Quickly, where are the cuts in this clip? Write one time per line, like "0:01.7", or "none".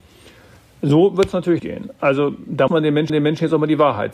0:01.6
0:02.7
0:03.1